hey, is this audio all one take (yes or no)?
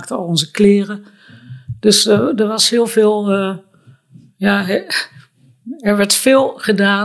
yes